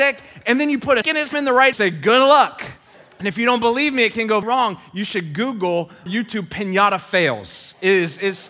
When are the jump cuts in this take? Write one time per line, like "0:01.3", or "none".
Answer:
0:01.0
0:01.3
0:01.7
0:02.9
0:04.4
0:06.1